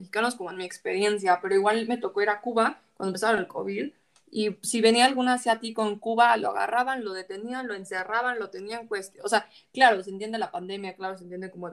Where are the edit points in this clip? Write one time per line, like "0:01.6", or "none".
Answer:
none